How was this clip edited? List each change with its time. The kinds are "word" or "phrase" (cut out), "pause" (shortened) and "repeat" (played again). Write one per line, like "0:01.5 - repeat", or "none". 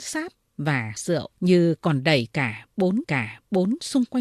0:01.0 - word
0:01.4 - pause
0:03.0 - repeat